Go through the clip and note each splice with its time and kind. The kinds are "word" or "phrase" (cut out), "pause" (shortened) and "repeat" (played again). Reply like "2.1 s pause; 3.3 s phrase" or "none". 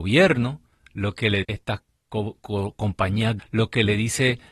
1.4 s word; 3.4 s word